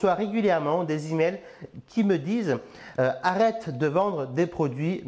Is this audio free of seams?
yes; 0 cuts

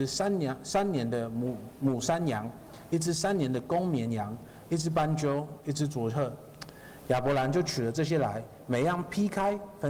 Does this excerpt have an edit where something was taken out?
no; 0 cuts

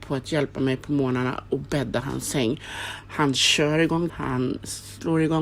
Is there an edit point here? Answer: yes; 1 cut; at 4.1 s

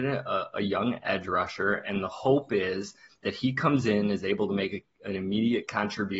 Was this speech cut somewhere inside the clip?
no; 0 cuts

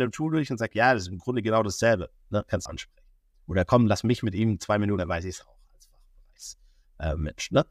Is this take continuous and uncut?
no; 2 cuts; at 2.7 s, 5.0 s

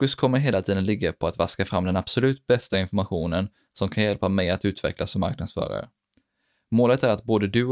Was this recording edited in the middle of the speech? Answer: no; 0 cuts

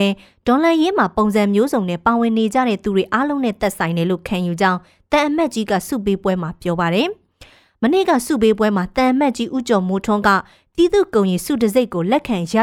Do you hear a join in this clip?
no; 0 cuts

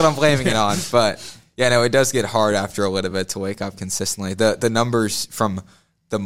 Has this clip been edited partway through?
no; 0 cuts

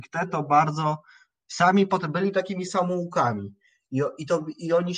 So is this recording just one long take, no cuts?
yes; 0 cuts

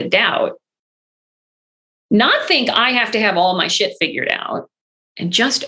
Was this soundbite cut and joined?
no; 0 cuts

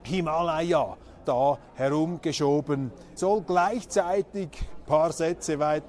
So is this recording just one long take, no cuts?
no; 3 cuts; at 1.2 s, 3.2 s, 4.8 s

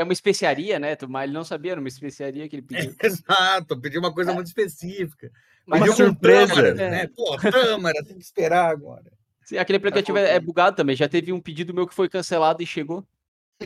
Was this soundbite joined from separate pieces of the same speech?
no; 0 cuts

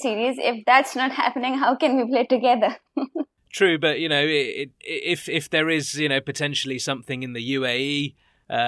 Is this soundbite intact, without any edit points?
no; 1 cut; at 4.7 s

